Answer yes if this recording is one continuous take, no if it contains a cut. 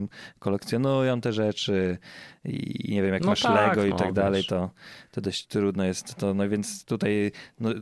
yes